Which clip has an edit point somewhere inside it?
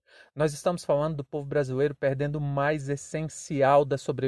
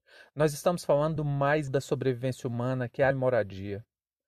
second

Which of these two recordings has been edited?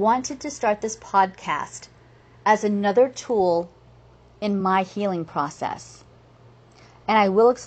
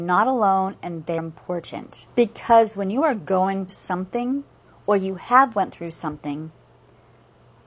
second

